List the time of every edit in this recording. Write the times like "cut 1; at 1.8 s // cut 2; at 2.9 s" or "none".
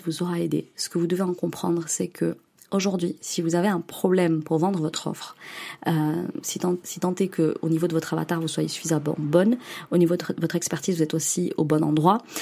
cut 1; at 6.8 s